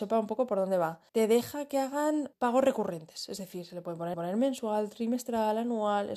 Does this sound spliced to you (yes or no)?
yes